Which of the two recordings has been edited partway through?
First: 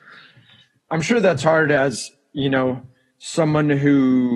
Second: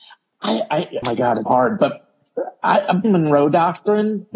second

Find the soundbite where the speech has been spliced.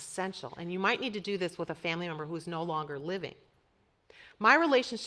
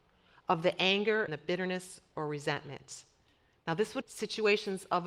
second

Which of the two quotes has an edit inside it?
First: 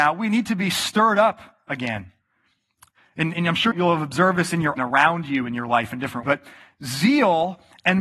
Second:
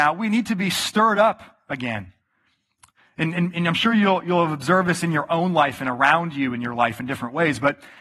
first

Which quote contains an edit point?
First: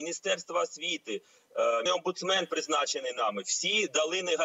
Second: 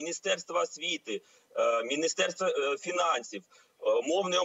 first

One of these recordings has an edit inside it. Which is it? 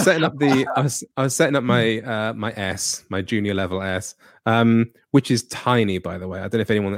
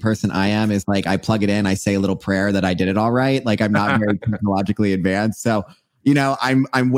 first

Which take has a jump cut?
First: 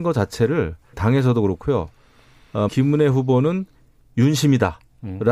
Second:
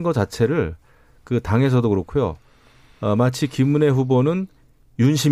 first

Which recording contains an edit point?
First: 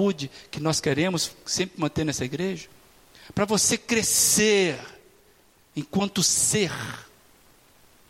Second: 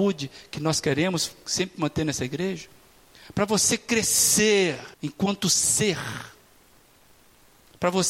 second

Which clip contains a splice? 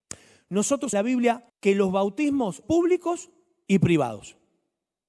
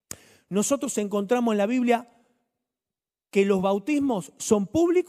first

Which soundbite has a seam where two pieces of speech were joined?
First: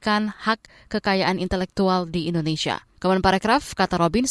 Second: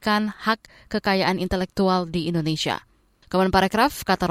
first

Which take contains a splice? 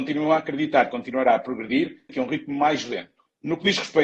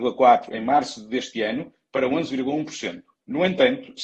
first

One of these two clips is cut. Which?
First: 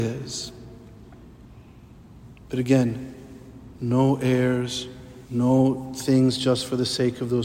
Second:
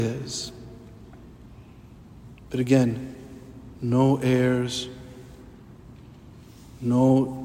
first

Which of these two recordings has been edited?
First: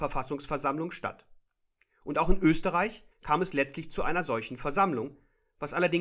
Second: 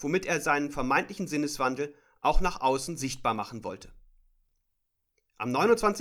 first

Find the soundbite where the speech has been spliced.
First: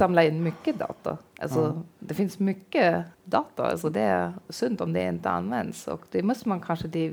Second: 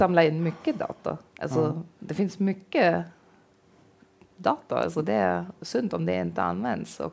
first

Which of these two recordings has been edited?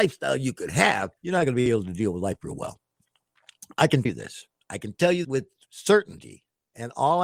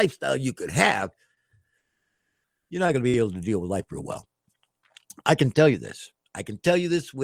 first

